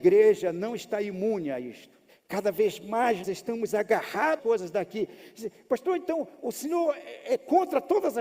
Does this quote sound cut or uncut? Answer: cut